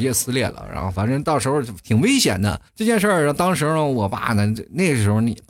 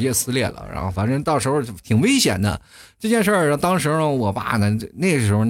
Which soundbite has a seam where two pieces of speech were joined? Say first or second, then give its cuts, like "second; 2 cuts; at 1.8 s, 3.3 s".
first; 1 cut; at 2.7 s